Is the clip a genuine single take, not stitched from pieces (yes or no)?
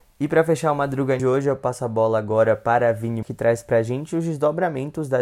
no